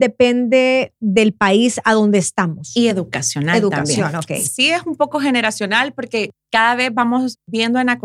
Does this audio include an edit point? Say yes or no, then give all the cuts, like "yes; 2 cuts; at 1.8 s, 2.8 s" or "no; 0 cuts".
no; 0 cuts